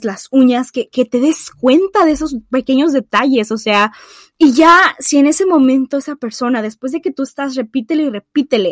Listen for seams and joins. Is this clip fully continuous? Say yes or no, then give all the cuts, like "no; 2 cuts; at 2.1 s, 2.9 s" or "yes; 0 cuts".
yes; 0 cuts